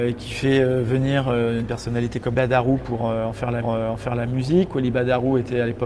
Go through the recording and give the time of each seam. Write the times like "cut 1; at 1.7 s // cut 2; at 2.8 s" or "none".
cut 1; at 2.3 s // cut 2; at 3.6 s